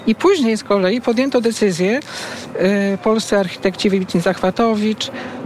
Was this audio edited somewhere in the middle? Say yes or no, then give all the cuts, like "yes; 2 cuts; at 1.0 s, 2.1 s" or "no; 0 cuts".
no; 0 cuts